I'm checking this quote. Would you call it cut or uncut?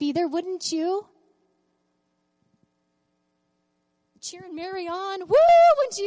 uncut